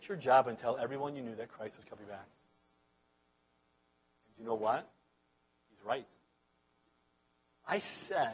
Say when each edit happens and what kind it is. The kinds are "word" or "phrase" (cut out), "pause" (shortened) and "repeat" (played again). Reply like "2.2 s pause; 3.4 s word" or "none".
none